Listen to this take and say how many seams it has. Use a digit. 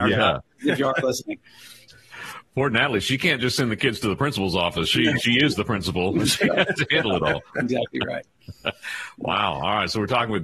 0